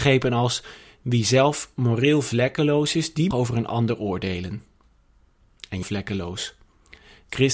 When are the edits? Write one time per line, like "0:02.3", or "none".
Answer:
0:03.3
0:05.8